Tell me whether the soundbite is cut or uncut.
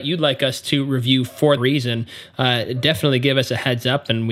cut